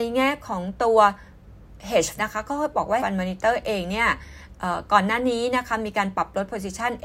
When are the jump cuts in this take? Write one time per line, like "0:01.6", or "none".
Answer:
0:02.2
0:03.0